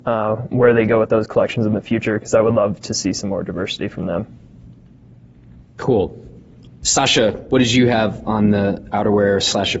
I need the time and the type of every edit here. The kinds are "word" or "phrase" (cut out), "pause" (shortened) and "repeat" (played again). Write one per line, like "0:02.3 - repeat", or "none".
none